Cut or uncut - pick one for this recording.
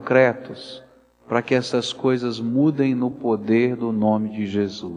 uncut